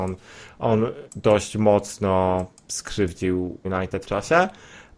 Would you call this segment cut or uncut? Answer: cut